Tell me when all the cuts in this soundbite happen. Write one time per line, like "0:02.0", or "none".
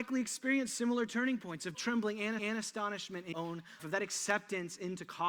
0:01.7
0:02.4
0:03.3
0:03.8